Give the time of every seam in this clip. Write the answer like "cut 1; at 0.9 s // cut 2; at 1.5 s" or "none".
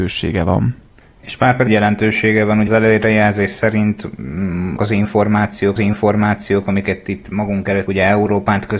cut 1; at 1.0 s // cut 2; at 1.7 s // cut 3; at 2.7 s // cut 4; at 4.8 s // cut 5; at 5.8 s // cut 6; at 7.9 s